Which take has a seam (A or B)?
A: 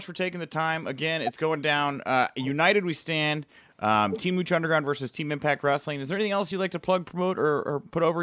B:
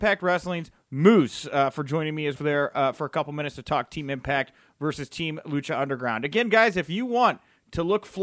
B